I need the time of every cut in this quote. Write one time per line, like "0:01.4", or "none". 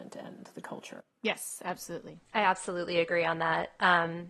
0:02.3